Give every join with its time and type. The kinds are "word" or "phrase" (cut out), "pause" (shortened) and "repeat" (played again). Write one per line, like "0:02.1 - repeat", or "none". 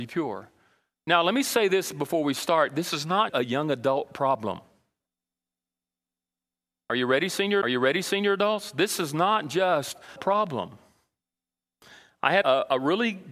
0:03.3 - word
0:07.6 - repeat
0:10.2 - phrase
0:12.4 - word